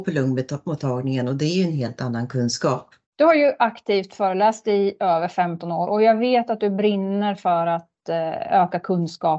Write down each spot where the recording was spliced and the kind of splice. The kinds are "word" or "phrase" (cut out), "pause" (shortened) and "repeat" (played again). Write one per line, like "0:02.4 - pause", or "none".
0:03.0 - pause